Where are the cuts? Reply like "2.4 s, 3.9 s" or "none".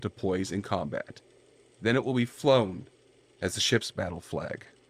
none